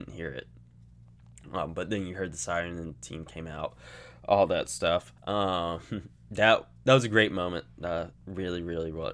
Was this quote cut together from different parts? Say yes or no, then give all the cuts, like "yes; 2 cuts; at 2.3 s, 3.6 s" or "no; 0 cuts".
yes; 2 cuts; at 5.2 s, 8.1 s